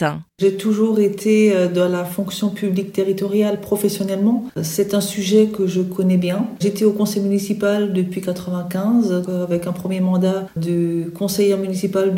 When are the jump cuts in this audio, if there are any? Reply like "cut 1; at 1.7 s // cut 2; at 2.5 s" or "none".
cut 1; at 9.3 s